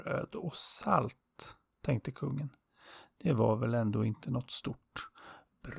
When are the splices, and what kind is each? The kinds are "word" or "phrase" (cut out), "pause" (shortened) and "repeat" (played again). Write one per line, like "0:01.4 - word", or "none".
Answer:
none